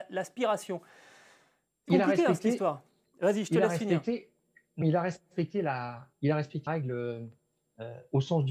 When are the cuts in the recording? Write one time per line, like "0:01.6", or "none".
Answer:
0:01.9
0:04.8
0:06.1
0:06.7